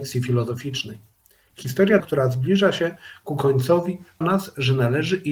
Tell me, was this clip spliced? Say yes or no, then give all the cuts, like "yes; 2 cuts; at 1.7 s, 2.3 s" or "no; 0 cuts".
yes; 2 cuts; at 2.0 s, 4.2 s